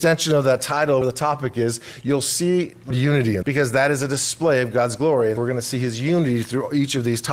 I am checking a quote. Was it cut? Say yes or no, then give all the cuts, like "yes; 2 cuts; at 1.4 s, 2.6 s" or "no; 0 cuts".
yes; 4 cuts; at 1.0 s, 2.9 s, 3.4 s, 5.4 s